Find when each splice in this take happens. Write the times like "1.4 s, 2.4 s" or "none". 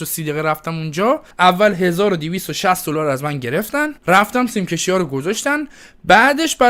1.3 s, 4.0 s